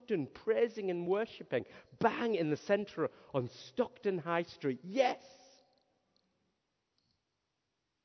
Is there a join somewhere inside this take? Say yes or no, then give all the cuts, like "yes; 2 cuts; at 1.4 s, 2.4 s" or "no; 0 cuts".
no; 0 cuts